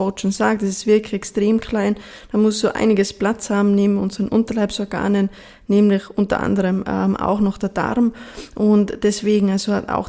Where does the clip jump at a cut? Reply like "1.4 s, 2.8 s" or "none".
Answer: none